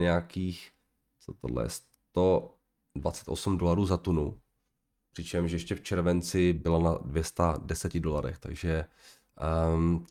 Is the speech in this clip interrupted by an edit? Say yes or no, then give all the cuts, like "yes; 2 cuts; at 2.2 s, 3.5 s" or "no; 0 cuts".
no; 0 cuts